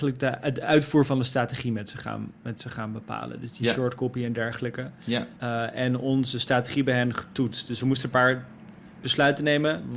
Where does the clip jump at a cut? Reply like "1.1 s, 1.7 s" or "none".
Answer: 5.4 s